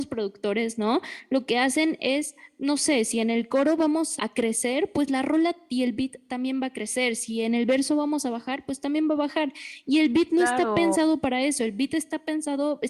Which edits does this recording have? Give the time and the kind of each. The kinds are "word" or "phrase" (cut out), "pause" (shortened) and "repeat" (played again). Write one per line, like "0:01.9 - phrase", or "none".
0:04.2 - word

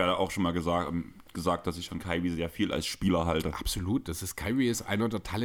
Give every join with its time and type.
0:01.9 - word

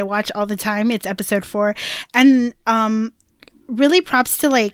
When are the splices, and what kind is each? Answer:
none

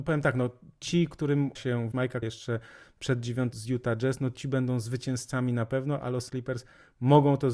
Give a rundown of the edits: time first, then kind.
0:01.6 - word
0:01.9 - word
0:02.2 - word
0:03.5 - word
0:06.3 - word

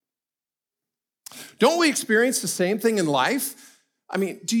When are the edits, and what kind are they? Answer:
none

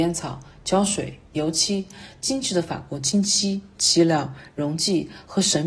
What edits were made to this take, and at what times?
none

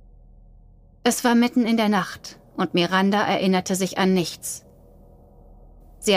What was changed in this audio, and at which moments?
none

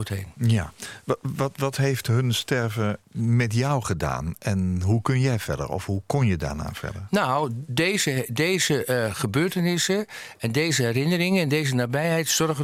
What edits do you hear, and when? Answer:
0:03.0 - pause

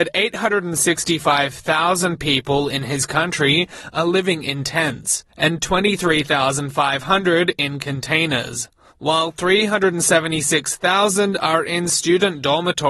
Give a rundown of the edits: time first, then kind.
0:05.3 - pause
0:08.9 - pause

